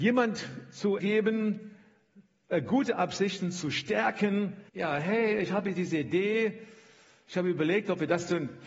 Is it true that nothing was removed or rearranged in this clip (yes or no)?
no